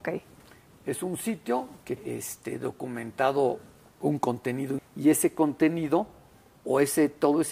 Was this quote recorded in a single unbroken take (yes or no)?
no